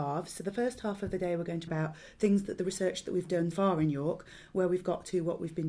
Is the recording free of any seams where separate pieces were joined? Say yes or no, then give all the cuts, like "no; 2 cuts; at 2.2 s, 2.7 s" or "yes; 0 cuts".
no; 2 cuts; at 1.7 s, 3.5 s